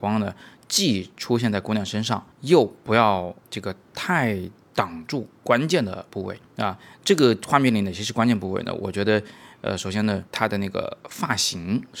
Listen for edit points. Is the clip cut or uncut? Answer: cut